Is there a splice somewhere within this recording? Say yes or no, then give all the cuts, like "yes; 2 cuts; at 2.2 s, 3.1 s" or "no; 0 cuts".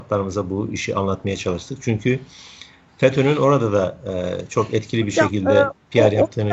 no; 0 cuts